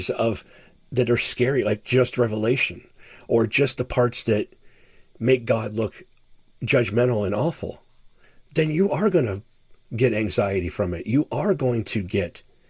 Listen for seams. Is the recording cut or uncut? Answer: uncut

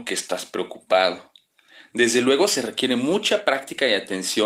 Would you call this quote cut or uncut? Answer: uncut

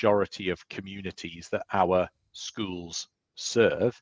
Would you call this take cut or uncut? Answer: uncut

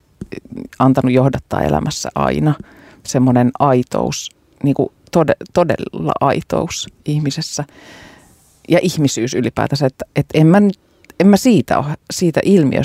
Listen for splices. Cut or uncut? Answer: uncut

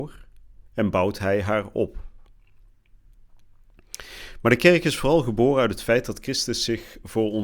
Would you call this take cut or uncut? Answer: uncut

